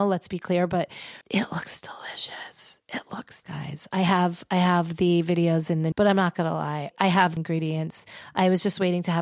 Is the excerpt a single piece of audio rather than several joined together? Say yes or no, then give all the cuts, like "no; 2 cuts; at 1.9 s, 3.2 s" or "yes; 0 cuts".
no; 5 cuts; at 1.2 s, 3.4 s, 5.9 s, 6.9 s, 7.4 s